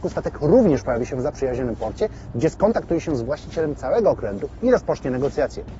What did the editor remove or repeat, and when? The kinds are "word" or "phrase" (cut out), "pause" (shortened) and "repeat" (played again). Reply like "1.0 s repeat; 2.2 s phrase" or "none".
none